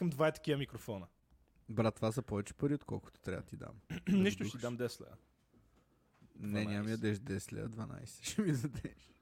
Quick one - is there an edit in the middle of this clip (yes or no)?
no